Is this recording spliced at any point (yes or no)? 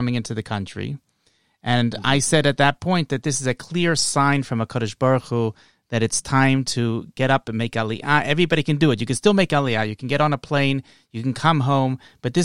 no